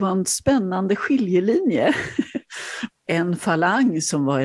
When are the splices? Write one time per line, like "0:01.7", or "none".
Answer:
0:02.9